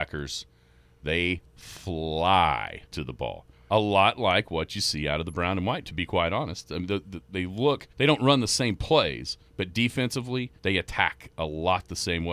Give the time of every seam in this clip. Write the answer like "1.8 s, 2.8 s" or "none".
2.9 s, 3.5 s, 7.9 s, 9.5 s, 10.6 s